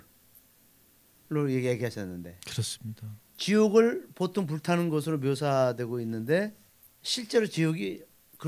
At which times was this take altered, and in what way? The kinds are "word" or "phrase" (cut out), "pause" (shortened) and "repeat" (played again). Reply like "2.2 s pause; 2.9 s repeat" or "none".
6.7 s pause

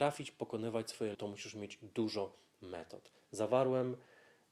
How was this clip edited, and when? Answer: 1.1 s word

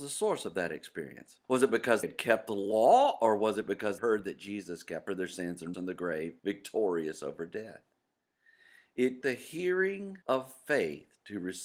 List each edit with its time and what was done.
1.4 s pause; 2.0 s word; 4.0 s phrase; 5.1 s phrase; 5.7 s word; 6.4 s pause; 9.2 s word; 10.2 s pause

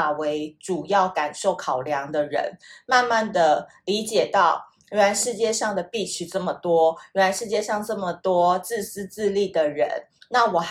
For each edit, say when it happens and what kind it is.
none

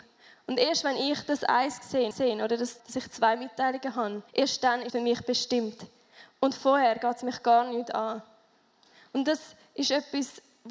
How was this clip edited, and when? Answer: 2.1 s repeat; 2.8 s word; 4.3 s pause; 4.9 s word

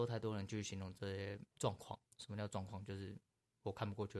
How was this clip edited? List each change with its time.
1.5 s pause; 2.1 s pause

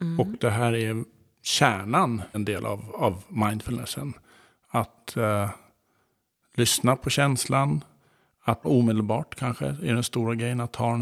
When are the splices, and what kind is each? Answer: 2.3 s word; 8.6 s phrase

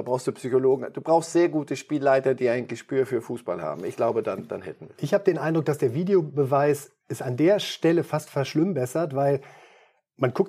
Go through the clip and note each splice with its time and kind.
none

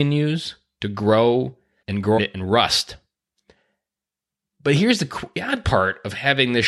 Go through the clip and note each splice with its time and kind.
1.8 s phrase; 2.2 s word

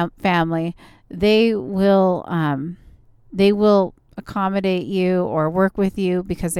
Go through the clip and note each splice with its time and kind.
none

